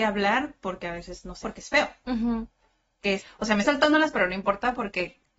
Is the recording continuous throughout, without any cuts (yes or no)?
no